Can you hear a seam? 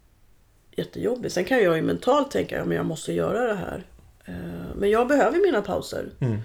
no; 0 cuts

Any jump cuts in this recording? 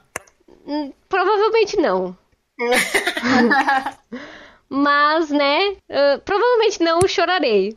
yes; 1 cut; at 5.8 s

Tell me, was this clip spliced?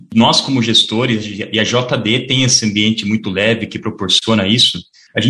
no; 0 cuts

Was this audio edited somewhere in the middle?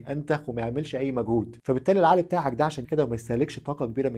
yes; 1 cut; at 2.8 s

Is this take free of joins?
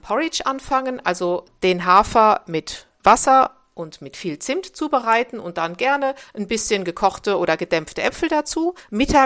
yes; 0 cuts

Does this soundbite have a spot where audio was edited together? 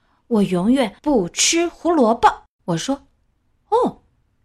yes; 2 cuts; at 1.0 s, 2.5 s

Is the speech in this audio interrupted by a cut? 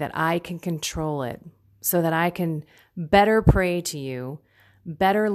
no; 0 cuts

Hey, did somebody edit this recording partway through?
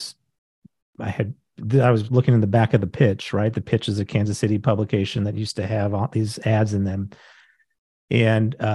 no; 0 cuts

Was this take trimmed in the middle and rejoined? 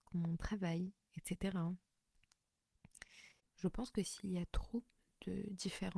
no; 0 cuts

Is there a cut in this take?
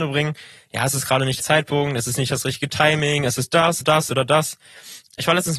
yes; 2 cuts; at 1.4 s, 3.8 s

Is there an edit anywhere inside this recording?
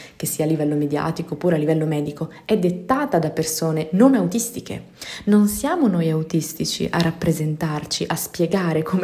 no; 0 cuts

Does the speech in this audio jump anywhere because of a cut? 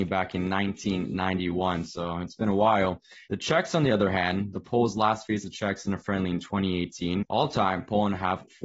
yes; 1 cut; at 3.3 s

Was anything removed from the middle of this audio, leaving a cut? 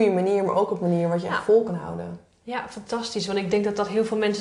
no; 0 cuts

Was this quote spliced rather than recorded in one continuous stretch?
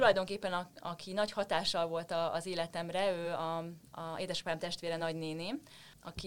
no; 0 cuts

